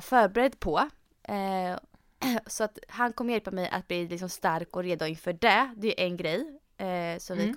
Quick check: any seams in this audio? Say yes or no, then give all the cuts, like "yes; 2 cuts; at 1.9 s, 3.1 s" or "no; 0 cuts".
no; 0 cuts